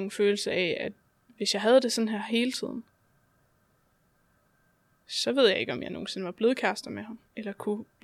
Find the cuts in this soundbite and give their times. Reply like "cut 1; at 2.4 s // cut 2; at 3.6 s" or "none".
none

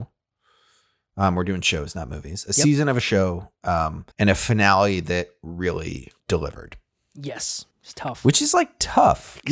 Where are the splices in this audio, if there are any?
cut 1; at 4.1 s // cut 2; at 6.2 s // cut 3; at 7.7 s

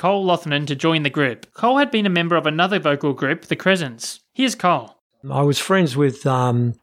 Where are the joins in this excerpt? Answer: cut 1; at 1.5 s // cut 2; at 4.3 s // cut 3; at 5.1 s

